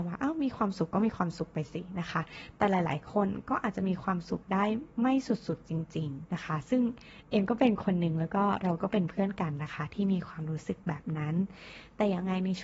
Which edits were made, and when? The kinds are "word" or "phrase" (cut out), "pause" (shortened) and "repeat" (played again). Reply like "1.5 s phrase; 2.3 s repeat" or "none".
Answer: 4.9 s pause; 6.3 s word; 7.2 s pause